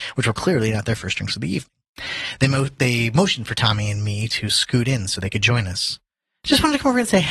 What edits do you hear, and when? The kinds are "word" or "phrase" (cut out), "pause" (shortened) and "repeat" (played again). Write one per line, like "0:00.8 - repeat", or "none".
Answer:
none